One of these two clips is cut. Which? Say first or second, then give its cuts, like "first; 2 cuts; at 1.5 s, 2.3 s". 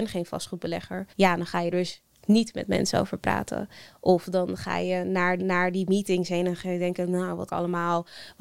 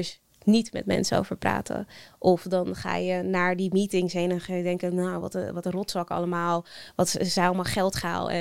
first; 4 cuts; at 1.1 s, 1.7 s, 5.4 s, 7.5 s